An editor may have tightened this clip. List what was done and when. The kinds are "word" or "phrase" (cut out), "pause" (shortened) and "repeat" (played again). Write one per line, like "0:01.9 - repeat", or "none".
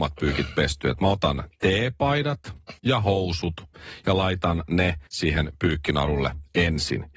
0:02.8 - pause
0:05.1 - pause